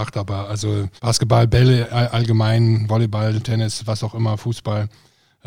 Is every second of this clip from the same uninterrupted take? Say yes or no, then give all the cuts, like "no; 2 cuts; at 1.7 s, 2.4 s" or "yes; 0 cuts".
no; 1 cut; at 1.0 s